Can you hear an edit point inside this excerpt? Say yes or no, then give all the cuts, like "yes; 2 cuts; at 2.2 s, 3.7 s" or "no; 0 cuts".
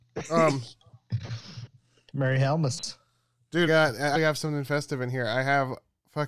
yes; 2 cuts; at 3.7 s, 4.1 s